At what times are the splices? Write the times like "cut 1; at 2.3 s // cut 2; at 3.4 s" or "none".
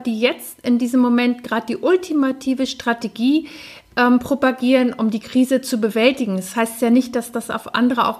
none